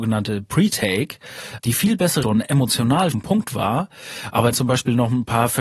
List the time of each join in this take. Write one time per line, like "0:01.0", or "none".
0:01.6
0:02.2
0:03.1
0:04.5